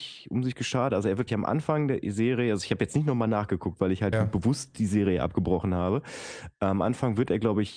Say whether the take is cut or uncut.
cut